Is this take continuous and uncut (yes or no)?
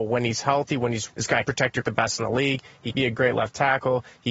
no